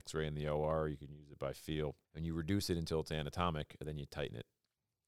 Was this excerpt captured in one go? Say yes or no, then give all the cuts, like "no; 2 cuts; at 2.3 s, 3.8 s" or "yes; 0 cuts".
no; 1 cut; at 2.0 s